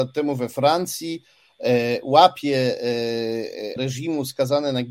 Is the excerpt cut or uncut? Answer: cut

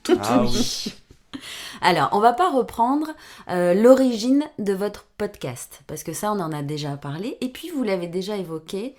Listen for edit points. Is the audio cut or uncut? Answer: uncut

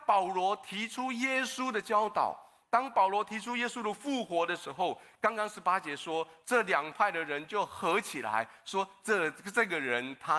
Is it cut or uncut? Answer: uncut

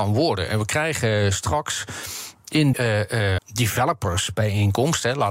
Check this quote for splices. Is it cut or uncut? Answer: cut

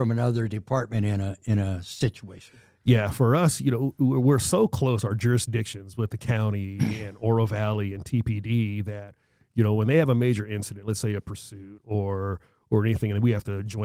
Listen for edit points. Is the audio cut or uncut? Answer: uncut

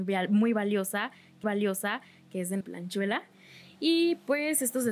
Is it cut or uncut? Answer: cut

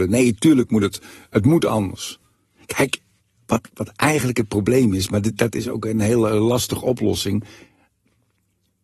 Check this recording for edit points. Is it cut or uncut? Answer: uncut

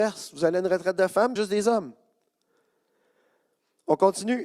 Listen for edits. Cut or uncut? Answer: cut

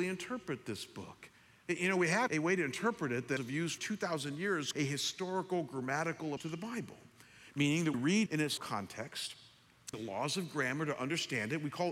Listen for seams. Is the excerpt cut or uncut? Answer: cut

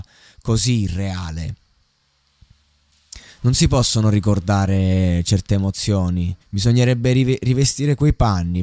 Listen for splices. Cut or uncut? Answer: cut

